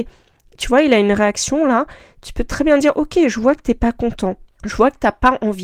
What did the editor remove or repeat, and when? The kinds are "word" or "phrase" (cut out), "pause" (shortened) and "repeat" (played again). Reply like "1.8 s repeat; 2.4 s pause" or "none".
4.5 s pause